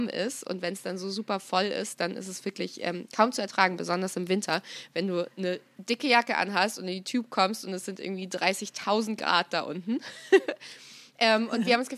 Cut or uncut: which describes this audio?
uncut